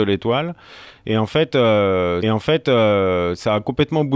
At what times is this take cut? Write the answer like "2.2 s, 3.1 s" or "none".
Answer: 2.2 s